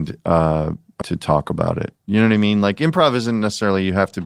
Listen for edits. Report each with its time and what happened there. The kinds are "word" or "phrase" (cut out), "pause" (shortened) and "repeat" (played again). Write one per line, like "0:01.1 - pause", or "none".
0:01.0 - word